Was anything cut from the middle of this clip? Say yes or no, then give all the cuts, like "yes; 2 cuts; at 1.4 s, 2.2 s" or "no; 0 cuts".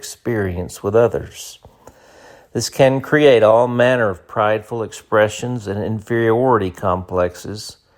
no; 0 cuts